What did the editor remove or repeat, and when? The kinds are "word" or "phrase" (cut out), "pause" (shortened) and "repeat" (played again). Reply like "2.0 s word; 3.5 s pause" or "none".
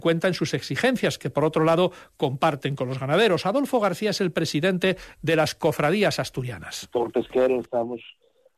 none